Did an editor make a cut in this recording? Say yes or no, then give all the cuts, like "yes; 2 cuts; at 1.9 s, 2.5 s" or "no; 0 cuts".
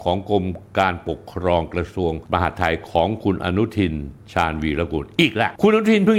yes; 1 cut; at 4.2 s